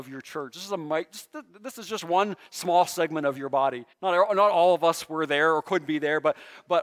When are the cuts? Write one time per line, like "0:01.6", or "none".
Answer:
0:03.9

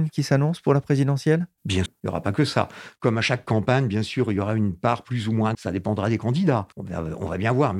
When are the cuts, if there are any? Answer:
0:01.9
0:05.5
0:06.7

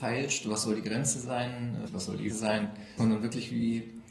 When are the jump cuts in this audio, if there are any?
0:01.9
0:02.3
0:03.0

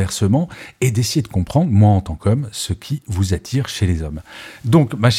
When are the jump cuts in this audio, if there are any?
none

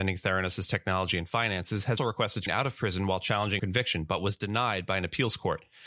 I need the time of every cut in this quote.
0:02.0
0:02.5
0:03.6

